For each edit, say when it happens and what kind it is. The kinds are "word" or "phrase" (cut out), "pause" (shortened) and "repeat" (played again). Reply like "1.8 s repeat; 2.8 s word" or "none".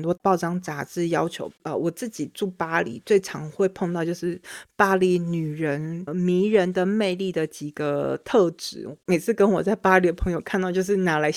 6.1 s word